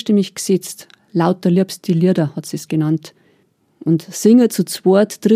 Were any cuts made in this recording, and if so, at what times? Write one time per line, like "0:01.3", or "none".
none